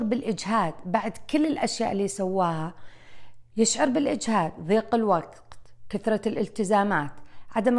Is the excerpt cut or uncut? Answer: uncut